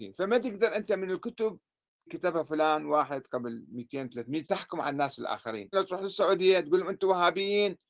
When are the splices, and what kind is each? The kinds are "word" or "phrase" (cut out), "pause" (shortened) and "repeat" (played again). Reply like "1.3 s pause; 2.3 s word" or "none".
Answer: 2.1 s word; 4.4 s word; 5.7 s word